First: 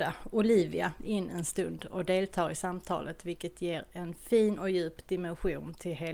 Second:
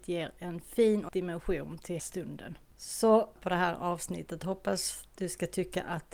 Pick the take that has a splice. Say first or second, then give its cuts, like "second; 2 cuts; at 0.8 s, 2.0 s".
second; 3 cuts; at 1.1 s, 2.0 s, 3.4 s